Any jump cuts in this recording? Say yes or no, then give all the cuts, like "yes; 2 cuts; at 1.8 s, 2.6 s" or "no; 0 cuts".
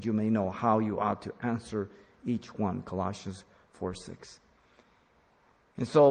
no; 0 cuts